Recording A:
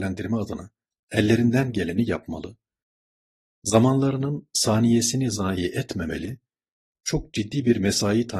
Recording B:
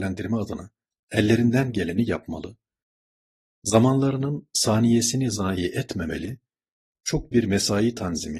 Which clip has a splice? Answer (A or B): B